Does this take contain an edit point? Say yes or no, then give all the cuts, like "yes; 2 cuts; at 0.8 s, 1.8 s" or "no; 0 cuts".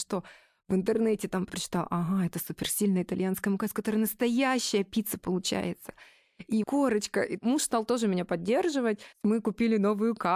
yes; 3 cuts; at 1.5 s, 6.6 s, 9.1 s